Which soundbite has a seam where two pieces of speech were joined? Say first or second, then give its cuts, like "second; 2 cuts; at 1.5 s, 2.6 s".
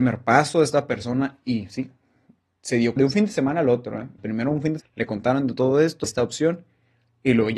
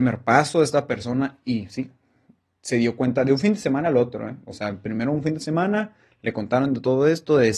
first; 4 cuts; at 3.0 s, 4.2 s, 4.8 s, 6.0 s